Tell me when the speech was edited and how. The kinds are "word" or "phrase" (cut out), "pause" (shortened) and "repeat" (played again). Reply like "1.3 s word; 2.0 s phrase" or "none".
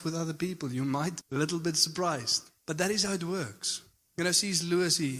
1.2 s word; 2.6 s pause